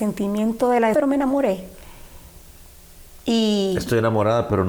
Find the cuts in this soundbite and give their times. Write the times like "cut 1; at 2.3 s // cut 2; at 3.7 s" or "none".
cut 1; at 0.9 s